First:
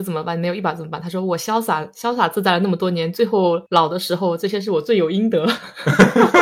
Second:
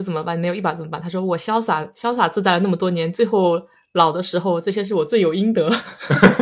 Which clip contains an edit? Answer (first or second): first